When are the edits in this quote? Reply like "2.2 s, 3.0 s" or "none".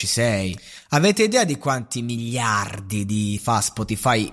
3.4 s